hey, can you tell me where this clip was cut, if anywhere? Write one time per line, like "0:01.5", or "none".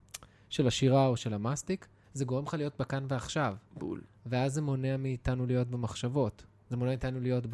none